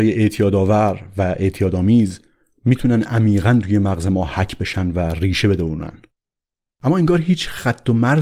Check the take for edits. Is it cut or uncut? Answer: uncut